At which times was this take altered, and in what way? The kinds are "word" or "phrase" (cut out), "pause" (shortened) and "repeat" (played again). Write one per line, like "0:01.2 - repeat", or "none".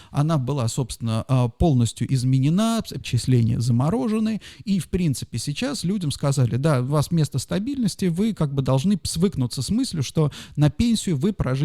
0:03.0 - word